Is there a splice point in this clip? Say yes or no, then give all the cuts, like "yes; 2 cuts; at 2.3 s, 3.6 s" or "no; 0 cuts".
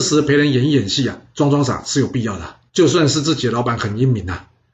yes; 1 cut; at 2.7 s